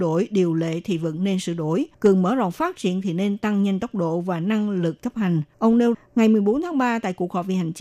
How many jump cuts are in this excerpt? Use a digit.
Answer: 3